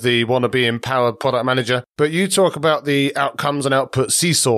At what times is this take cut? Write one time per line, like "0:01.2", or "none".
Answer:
0:01.9